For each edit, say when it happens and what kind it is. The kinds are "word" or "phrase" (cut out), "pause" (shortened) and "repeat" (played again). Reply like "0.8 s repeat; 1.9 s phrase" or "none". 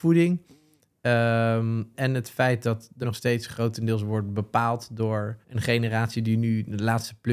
1.9 s word; 3.0 s word; 5.4 s pause